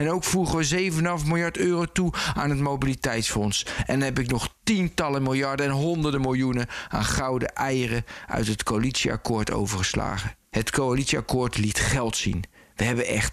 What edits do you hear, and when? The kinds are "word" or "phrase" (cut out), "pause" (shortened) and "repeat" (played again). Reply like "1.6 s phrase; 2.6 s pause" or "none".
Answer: 10.4 s pause